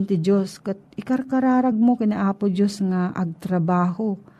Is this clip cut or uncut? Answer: uncut